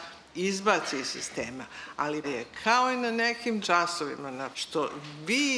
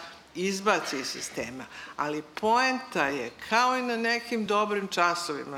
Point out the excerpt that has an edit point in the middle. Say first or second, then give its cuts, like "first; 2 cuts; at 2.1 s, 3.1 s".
first; 3 cuts; at 2.2 s, 3.6 s, 4.5 s